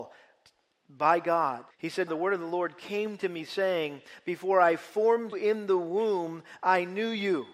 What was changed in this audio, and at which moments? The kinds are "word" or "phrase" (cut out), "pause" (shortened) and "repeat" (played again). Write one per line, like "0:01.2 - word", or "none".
0:01.7 - pause
0:02.1 - word
0:05.3 - word